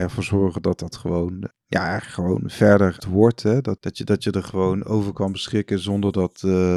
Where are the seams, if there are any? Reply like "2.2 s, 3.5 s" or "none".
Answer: 0.9 s, 1.5 s, 3.0 s, 3.8 s